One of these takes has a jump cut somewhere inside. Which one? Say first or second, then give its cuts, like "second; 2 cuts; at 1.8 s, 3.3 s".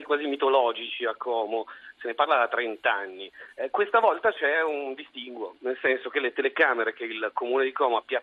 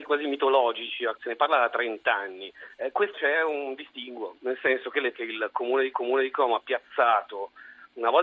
second; 4 cuts; at 1.2 s, 3.1 s, 5.1 s, 5.9 s